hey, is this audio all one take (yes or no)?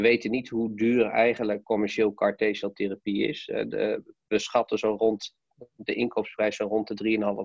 no